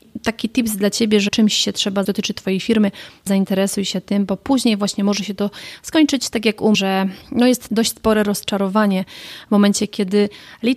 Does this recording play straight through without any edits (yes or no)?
no